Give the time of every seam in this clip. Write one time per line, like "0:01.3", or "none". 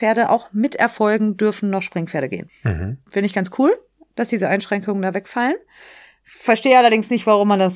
none